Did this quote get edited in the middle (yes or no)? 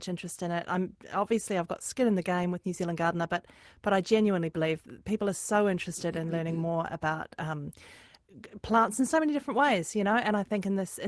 no